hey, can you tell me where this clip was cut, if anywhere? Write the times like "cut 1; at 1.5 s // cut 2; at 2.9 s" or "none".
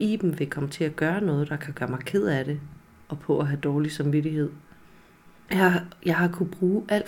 none